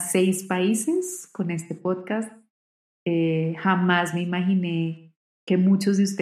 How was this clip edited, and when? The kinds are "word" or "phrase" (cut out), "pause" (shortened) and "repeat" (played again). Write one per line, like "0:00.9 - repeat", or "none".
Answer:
none